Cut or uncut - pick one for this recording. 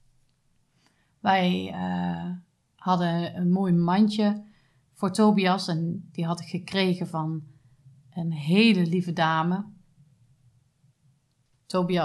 uncut